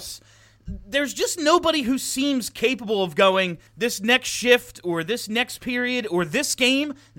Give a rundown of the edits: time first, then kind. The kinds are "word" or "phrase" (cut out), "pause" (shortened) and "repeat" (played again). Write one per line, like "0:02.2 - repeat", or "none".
0:03.7 - pause